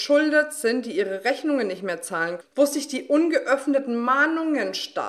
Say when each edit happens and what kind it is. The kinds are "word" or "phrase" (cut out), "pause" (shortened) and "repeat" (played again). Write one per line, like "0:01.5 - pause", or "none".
0:02.4 - word

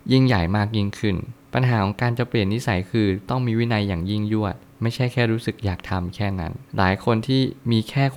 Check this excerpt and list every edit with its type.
0:06.7 - pause

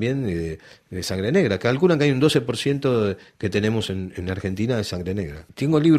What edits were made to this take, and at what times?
none

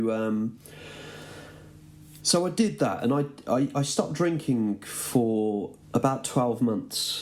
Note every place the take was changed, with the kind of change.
0:05.8 - pause

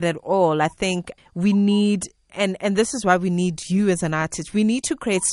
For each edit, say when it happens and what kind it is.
0:01.2 - word
0:02.3 - word

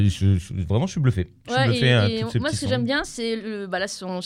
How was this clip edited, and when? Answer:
none

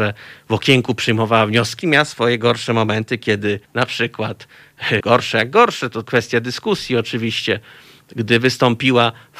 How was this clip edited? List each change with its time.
0:01.8 - phrase
0:03.6 - pause
0:05.0 - word
0:06.0 - word

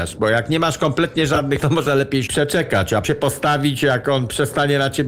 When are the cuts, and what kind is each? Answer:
0:01.6 - word
0:02.3 - phrase
0:03.0 - word

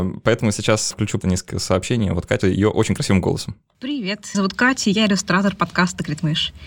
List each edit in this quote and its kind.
0:00.9 - word
0:01.2 - word
0:02.4 - phrase
0:04.3 - word

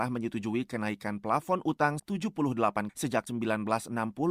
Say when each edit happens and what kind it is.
0:02.0 - word
0:02.9 - word
0:03.3 - word

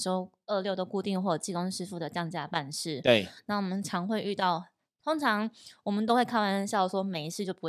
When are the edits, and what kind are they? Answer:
none

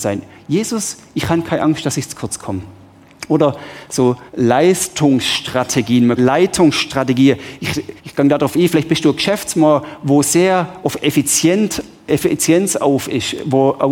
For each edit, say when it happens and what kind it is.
0:04.3 - pause
0:06.2 - phrase
0:08.0 - pause

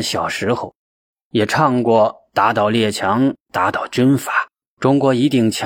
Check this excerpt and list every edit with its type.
0:04.6 - pause

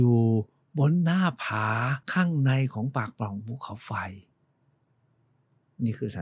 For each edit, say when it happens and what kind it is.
0:02.0 - pause

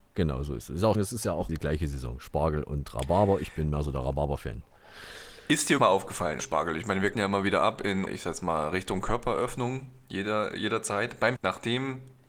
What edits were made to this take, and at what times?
0:00.9 - word
0:01.5 - word
0:05.8 - word
0:06.4 - word
0:07.1 - word
0:08.1 - word
0:11.4 - word

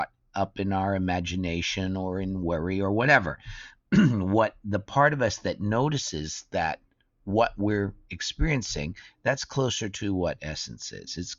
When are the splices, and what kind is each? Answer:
none

